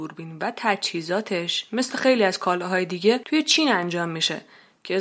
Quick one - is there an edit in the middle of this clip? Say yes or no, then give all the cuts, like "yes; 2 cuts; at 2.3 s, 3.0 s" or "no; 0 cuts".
no; 0 cuts